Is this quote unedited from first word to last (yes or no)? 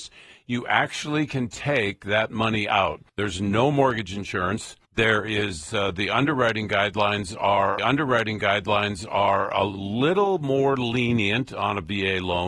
no